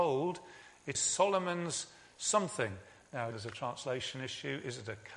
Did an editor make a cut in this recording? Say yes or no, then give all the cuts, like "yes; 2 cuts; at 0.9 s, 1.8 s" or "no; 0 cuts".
yes; 2 cuts; at 0.9 s, 3.3 s